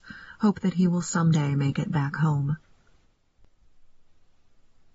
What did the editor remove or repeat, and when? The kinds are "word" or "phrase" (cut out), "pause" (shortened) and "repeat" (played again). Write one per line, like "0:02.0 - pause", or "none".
none